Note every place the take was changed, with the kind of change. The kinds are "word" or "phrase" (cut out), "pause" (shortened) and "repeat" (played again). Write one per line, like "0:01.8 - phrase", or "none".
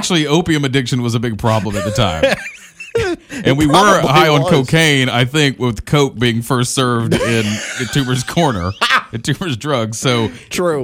none